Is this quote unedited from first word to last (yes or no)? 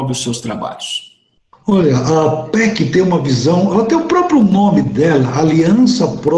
yes